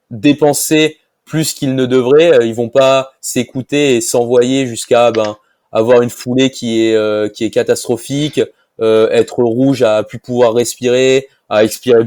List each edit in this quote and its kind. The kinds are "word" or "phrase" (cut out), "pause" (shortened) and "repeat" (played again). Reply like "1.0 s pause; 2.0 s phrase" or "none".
none